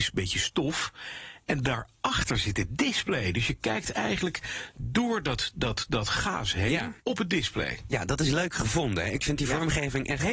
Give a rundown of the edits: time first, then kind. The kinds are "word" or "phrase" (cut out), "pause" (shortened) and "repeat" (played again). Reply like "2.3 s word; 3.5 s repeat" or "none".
7.0 s pause